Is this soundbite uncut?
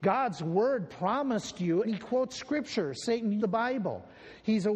no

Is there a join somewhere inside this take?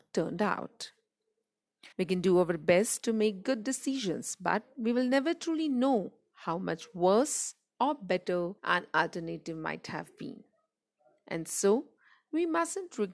yes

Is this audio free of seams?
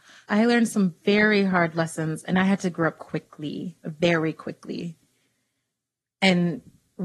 yes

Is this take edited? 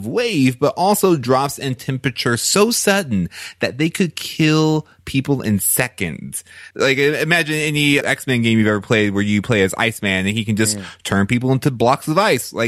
yes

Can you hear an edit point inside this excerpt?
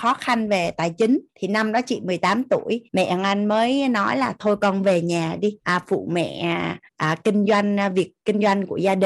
yes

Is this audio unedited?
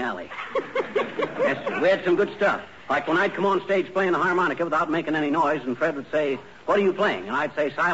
yes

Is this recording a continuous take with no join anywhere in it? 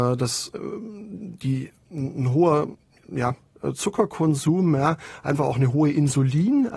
yes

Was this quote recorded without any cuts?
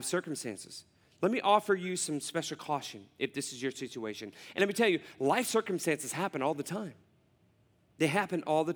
yes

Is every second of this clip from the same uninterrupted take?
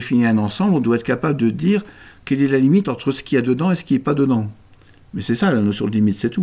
yes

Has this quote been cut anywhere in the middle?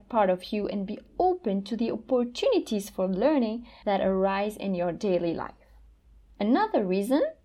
no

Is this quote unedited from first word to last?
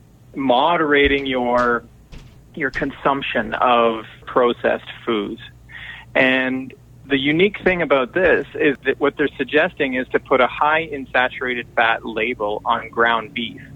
no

